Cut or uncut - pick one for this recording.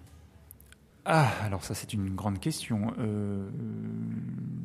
uncut